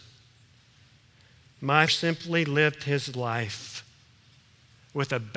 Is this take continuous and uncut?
no; 1 cut; at 1.9 s

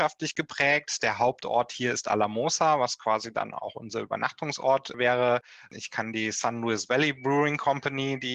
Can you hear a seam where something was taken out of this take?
no; 0 cuts

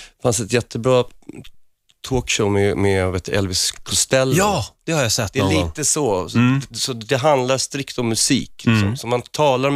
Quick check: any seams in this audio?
no; 0 cuts

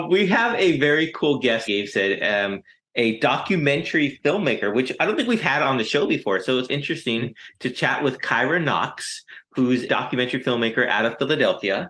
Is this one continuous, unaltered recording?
no; 3 cuts; at 1.7 s, 6.7 s, 9.9 s

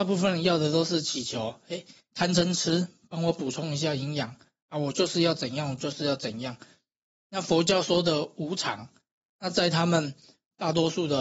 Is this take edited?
no; 0 cuts

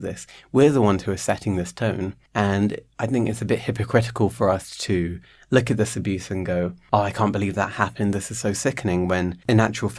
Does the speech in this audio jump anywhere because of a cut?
no; 0 cuts

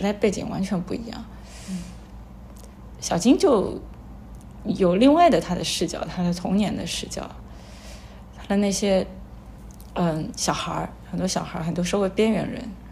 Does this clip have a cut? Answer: no; 0 cuts

